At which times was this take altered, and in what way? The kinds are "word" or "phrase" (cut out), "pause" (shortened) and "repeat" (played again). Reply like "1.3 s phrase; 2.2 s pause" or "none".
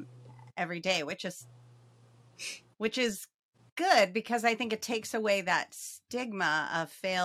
none